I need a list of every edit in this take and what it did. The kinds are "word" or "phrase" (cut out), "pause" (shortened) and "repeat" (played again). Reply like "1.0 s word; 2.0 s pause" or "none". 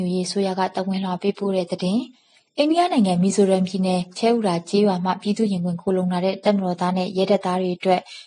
2.1 s pause